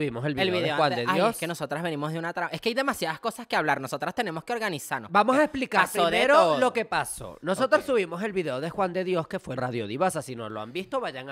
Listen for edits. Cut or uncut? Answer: cut